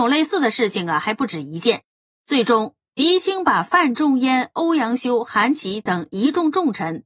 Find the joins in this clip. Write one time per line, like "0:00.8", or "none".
none